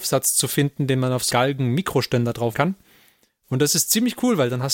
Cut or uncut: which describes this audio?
cut